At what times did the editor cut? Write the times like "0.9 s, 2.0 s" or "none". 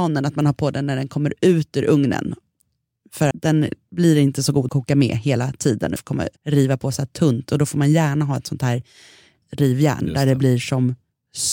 3.3 s, 4.7 s, 6.0 s, 6.4 s, 9.4 s